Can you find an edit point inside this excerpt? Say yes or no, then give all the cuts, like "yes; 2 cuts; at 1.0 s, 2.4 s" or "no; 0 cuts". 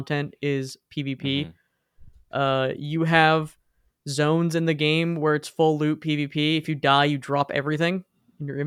no; 0 cuts